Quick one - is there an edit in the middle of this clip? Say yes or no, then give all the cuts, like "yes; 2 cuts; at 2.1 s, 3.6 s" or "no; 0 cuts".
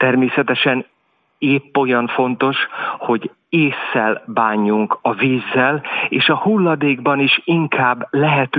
no; 0 cuts